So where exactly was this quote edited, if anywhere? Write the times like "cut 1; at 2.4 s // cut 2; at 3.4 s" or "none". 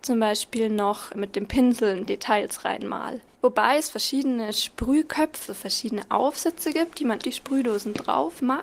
cut 1; at 2.1 s // cut 2; at 3.3 s // cut 3; at 5.5 s // cut 4; at 7.2 s